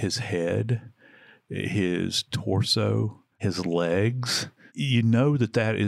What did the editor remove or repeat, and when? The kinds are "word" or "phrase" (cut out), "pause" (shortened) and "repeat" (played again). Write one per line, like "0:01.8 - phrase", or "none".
none